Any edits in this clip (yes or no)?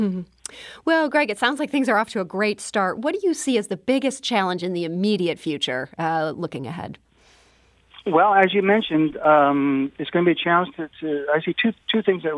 no